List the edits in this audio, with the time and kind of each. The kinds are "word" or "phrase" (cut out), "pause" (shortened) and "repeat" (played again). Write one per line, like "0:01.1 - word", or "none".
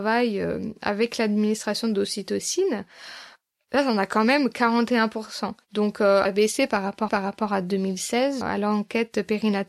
0:05.6 - pause
0:06.2 - phrase
0:07.1 - repeat
0:08.4 - word